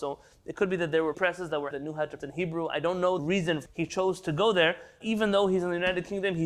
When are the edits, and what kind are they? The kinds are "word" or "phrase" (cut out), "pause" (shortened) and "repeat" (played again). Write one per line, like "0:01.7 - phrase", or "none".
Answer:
0:01.1 - word
0:01.7 - word
0:02.2 - word
0:03.2 - word
0:03.7 - word
0:05.0 - word